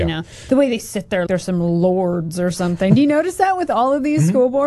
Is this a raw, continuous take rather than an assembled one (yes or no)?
no